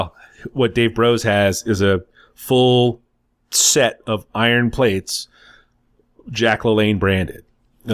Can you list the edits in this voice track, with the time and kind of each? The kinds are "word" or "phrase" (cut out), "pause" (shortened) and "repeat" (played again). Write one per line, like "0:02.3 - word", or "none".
none